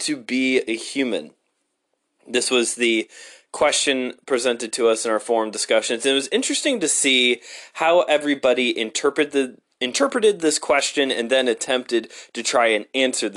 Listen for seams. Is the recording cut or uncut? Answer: uncut